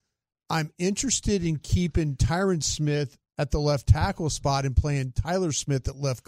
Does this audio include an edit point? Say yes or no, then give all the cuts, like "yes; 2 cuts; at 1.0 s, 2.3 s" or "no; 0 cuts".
no; 0 cuts